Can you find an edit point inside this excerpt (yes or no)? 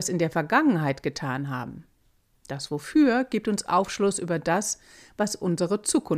no